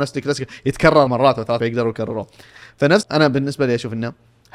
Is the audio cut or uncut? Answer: cut